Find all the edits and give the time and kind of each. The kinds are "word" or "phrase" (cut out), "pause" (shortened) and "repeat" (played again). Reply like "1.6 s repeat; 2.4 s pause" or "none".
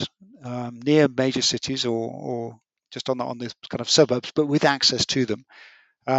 none